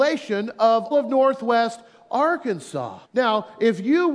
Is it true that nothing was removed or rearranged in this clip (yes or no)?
no